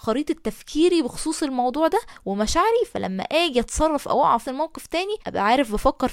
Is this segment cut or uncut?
cut